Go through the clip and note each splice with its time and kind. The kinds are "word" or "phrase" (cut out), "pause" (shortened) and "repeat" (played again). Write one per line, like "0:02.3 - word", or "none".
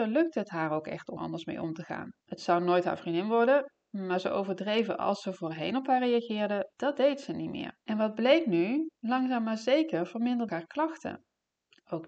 0:01.2 - word
0:02.2 - pause
0:06.7 - pause
0:07.8 - pause
0:09.0 - pause
0:10.5 - word